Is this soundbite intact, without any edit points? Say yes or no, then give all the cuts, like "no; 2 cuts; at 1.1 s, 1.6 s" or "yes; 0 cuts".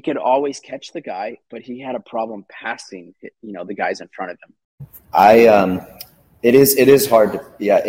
yes; 0 cuts